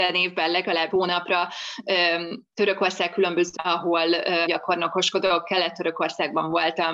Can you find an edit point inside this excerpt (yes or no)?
yes